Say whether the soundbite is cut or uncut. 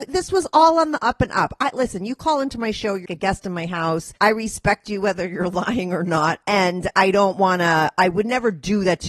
cut